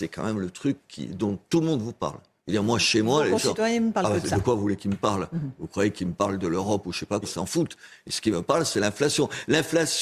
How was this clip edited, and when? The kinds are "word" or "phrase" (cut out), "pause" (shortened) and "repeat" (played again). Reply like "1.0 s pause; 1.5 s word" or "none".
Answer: 2.4 s pause; 7.2 s word